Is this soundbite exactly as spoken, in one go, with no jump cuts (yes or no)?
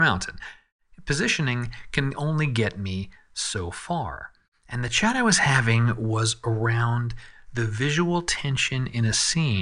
yes